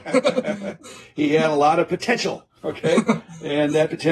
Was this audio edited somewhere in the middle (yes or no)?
no